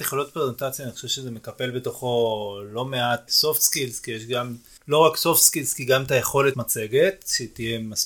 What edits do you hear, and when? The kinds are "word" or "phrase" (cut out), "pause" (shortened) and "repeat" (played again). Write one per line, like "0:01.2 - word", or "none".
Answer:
0:03.3 - word
0:04.8 - pause
0:06.5 - word